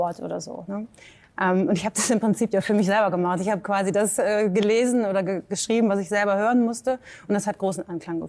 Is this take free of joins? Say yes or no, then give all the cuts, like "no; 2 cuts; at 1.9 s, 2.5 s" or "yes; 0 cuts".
yes; 0 cuts